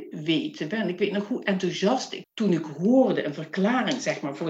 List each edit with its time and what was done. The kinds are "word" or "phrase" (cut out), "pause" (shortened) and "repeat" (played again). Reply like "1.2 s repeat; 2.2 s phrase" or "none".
2.2 s word